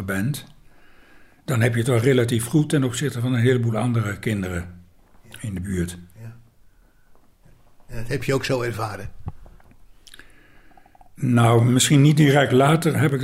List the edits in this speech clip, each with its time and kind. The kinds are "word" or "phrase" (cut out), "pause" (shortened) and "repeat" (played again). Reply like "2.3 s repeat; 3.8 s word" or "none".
none

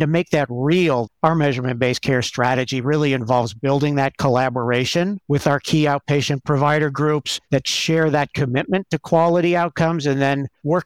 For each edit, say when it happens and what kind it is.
1.1 s word

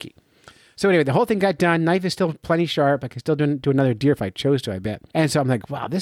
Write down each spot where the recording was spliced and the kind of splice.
5.1 s pause

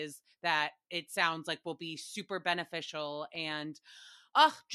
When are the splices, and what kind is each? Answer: none

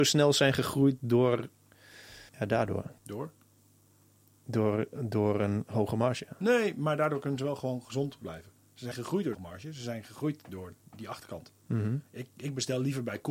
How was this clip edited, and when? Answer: 2.3 s pause; 3.0 s pause; 8.2 s word; 8.9 s word; 9.3 s phrase

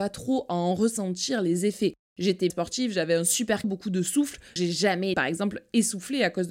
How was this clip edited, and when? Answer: 2.5 s word; 3.6 s word; 4.6 s word; 5.1 s word

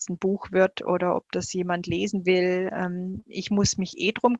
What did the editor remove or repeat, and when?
none

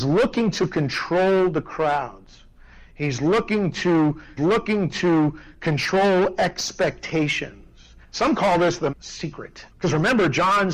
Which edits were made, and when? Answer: 4.4 s repeat; 8.0 s pause; 8.9 s word; 9.7 s pause

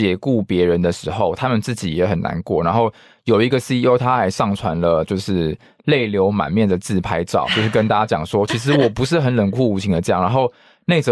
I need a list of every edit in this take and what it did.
none

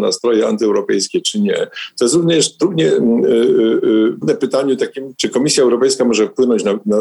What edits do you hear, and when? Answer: 2.6 s word; 4.2 s word; 5.1 s word

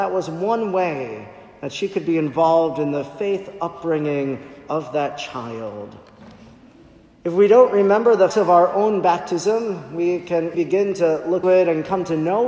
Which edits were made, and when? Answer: 8.3 s word; 10.5 s word; 11.4 s word

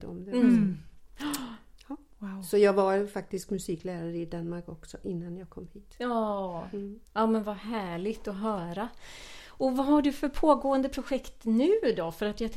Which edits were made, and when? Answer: 7.1 s pause

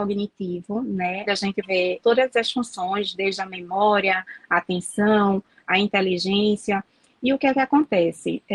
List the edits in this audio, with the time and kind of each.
1.2 s word; 1.6 s word; 2.0 s word

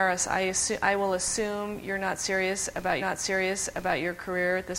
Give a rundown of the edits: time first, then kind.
3.0 s repeat

